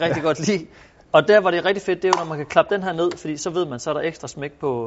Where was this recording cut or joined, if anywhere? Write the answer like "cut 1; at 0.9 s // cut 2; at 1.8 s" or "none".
none